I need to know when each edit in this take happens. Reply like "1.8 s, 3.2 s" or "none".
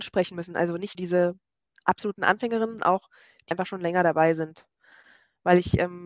0.9 s, 1.7 s, 2.8 s, 3.5 s